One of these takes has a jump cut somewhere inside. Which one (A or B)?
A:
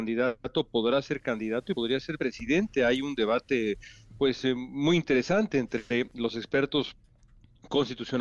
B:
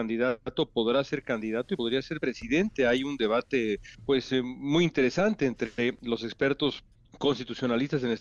B